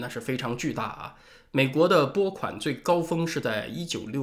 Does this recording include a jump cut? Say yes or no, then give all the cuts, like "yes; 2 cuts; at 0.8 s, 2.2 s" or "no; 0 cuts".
no; 0 cuts